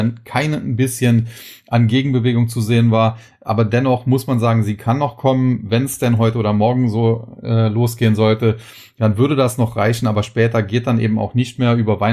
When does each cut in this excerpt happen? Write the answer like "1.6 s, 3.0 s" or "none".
none